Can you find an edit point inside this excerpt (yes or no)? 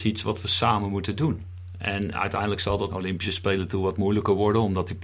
yes